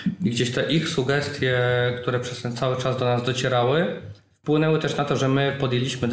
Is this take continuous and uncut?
yes; 0 cuts

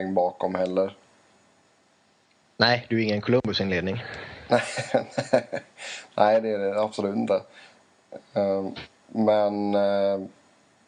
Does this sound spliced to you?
no; 0 cuts

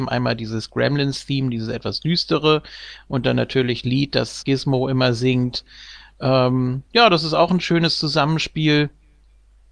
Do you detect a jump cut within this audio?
yes; 3 cuts; at 3.8 s, 4.4 s, 6.9 s

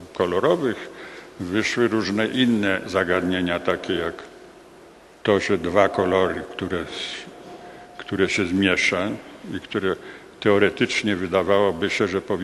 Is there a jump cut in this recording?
no; 0 cuts

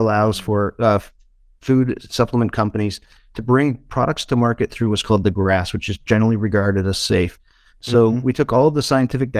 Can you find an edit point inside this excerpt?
no; 0 cuts

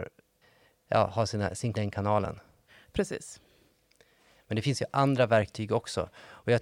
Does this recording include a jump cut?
yes; 1 cut; at 1.7 s

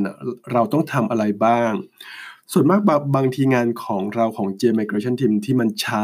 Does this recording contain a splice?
no; 0 cuts

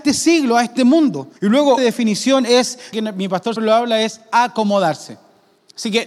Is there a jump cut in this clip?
yes; 4 cuts; at 1.4 s, 1.8 s, 2.9 s, 3.6 s

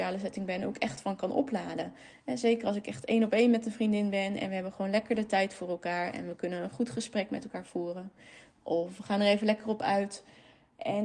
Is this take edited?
no; 0 cuts

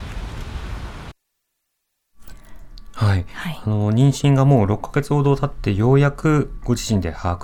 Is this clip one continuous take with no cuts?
yes; 0 cuts

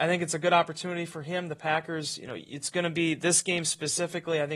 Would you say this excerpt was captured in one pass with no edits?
yes; 0 cuts

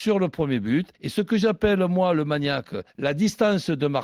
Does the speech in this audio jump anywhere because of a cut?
yes; 2 cuts; at 0.9 s, 2.9 s

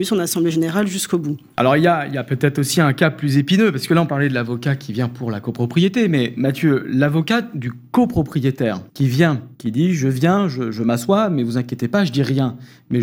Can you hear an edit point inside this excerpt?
yes; 2 cuts; at 8.9 s, 9.5 s

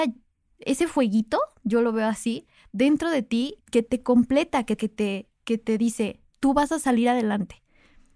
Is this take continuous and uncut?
no; 3 cuts; at 3.6 s, 4.8 s, 6.3 s

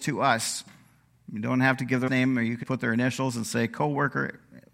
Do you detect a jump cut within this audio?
yes; 2 cuts; at 2.1 s, 2.6 s

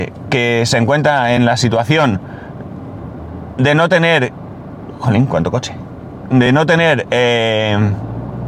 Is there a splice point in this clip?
no; 0 cuts

